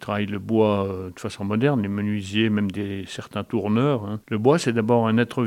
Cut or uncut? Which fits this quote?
cut